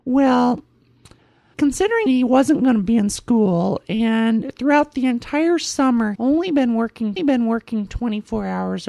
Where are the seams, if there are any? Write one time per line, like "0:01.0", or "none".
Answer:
0:01.5
0:02.1
0:06.1
0:07.2